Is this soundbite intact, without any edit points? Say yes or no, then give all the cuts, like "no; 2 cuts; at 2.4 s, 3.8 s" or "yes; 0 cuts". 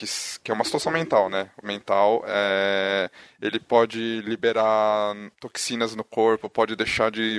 no; 2 cuts; at 1.6 s, 5.3 s